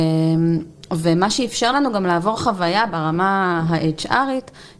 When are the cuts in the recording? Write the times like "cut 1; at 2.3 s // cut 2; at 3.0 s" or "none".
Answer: none